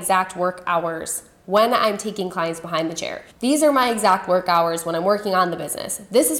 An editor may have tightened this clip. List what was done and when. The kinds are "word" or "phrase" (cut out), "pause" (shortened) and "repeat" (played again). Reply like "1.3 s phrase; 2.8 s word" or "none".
3.3 s pause